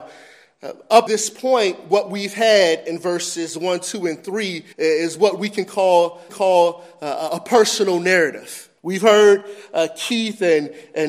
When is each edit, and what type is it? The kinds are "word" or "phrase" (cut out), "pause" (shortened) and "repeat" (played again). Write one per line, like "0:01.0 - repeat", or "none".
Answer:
0:01.1 - word
0:04.7 - pause
0:06.3 - repeat
0:08.8 - pause